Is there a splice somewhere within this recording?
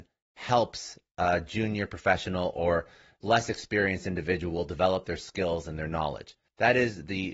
no; 0 cuts

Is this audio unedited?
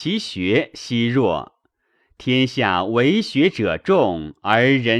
yes; 0 cuts

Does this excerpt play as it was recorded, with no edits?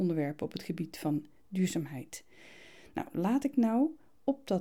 yes; 0 cuts

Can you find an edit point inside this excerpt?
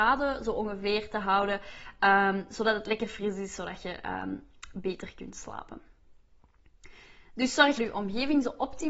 yes; 1 cut; at 7.8 s

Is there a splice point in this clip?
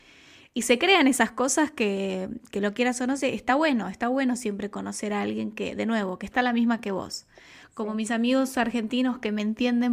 no; 0 cuts

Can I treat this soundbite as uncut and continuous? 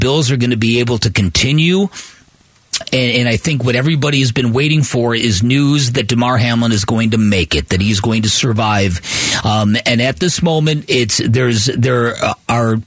no; 1 cut; at 2.8 s

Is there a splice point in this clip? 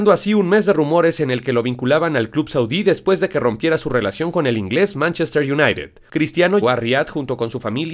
yes; 1 cut; at 6.6 s

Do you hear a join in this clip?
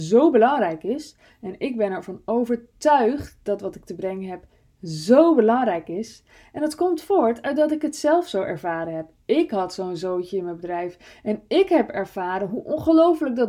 no; 0 cuts

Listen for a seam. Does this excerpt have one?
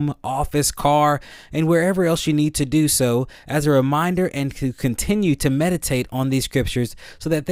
no; 0 cuts

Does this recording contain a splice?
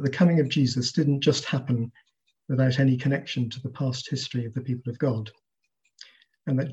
no; 0 cuts

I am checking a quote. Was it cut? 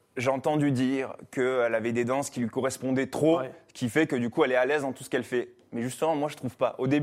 no; 0 cuts

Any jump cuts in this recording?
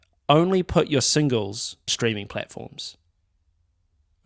yes; 1 cut; at 1.9 s

